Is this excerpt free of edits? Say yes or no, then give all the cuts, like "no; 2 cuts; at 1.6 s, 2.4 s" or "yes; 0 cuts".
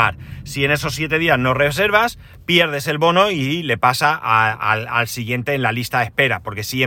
yes; 0 cuts